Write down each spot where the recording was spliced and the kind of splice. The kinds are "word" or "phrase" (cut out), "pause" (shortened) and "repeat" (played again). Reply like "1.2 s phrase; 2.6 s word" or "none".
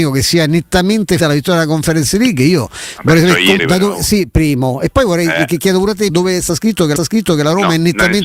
1.2 s word; 3.6 s word; 6.1 s word; 7.0 s repeat